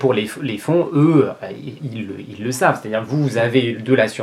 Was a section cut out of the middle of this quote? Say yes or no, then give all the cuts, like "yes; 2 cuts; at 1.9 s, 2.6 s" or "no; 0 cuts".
yes; 1 cut; at 1.8 s